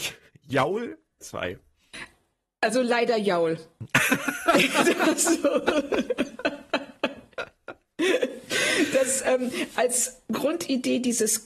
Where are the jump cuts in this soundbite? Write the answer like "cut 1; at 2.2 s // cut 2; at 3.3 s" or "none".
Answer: cut 1; at 1.2 s